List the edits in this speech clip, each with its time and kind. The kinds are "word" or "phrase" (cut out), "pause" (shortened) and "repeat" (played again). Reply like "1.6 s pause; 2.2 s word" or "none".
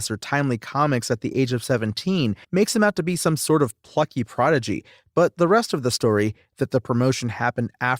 2.4 s pause